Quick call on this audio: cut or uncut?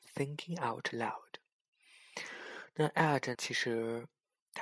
cut